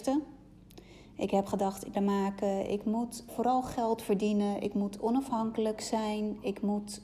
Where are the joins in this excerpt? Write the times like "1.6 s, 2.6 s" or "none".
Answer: 1.9 s, 3.3 s